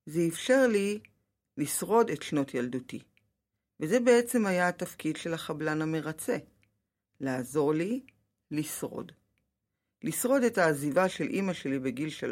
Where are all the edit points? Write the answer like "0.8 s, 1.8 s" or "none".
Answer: none